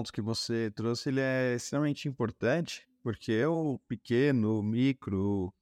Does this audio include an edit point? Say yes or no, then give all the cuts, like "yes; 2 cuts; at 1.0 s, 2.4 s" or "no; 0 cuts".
no; 0 cuts